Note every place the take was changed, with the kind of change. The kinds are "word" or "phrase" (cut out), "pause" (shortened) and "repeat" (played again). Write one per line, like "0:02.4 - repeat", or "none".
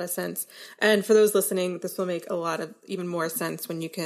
none